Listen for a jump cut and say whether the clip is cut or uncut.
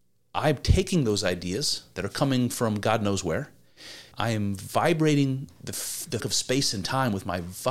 cut